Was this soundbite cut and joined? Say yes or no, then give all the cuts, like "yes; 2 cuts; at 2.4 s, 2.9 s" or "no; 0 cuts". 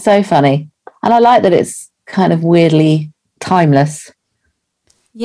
no; 0 cuts